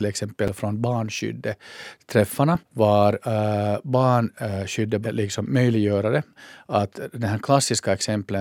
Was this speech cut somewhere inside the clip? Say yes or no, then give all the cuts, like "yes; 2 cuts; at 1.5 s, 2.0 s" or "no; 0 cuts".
yes; 2 cuts; at 2.7 s, 5.0 s